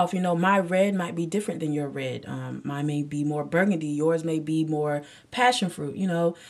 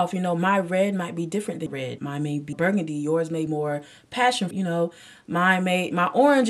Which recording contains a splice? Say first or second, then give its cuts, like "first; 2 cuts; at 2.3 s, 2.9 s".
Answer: second; 5 cuts; at 1.7 s, 2.0 s, 2.5 s, 3.5 s, 4.5 s